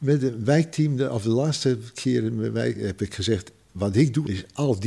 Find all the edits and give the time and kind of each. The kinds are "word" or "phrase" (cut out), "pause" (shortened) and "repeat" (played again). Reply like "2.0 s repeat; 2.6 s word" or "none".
none